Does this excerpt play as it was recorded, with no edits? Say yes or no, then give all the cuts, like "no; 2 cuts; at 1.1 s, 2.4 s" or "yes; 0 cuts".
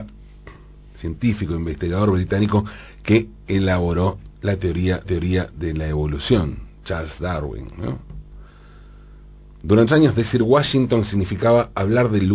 no; 3 cuts; at 4.3 s, 5.0 s, 9.9 s